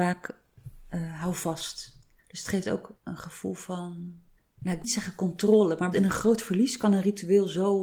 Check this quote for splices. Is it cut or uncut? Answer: cut